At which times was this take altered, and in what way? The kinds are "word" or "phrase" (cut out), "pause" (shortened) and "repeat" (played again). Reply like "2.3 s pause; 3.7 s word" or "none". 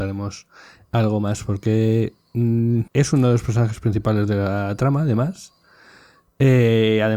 2.9 s pause